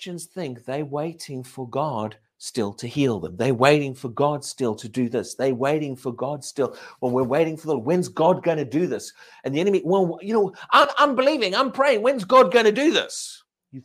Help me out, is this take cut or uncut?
uncut